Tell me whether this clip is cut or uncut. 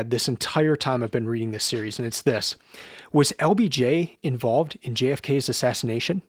uncut